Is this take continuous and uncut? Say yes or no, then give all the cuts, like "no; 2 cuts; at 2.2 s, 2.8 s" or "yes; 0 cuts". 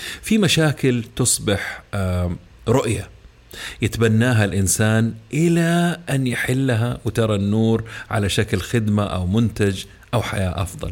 yes; 0 cuts